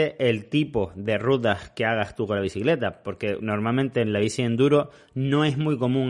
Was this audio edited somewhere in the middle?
no; 0 cuts

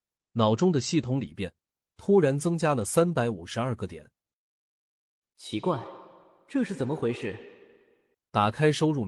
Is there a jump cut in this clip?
no; 0 cuts

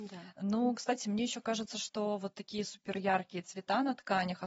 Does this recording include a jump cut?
no; 0 cuts

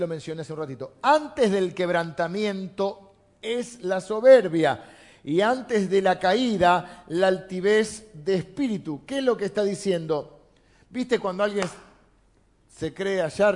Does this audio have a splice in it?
no; 0 cuts

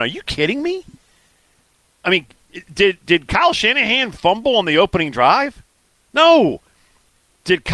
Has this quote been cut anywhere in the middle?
no; 0 cuts

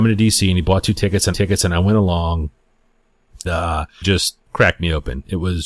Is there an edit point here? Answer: yes; 4 cuts; at 1.3 s, 3.4 s, 4.0 s, 4.4 s

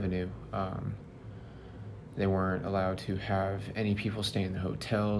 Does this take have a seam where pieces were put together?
no; 0 cuts

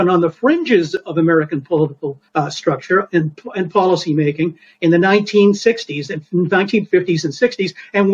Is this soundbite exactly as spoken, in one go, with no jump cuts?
no; 1 cut; at 2.3 s

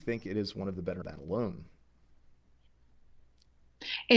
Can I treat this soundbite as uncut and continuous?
no; 1 cut; at 1.0 s

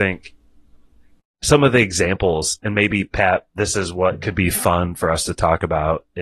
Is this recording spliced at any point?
no; 0 cuts

